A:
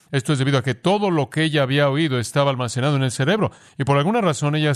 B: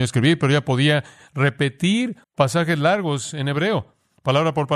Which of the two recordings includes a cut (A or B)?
B